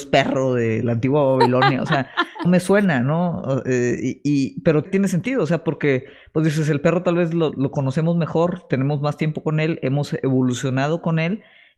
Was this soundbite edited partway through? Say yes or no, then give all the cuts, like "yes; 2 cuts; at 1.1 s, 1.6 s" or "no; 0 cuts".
yes; 3 cuts; at 2.4 s, 4.8 s, 7.5 s